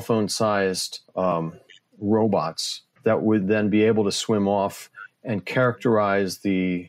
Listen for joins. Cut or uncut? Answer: cut